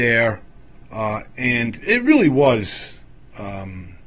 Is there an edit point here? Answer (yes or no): yes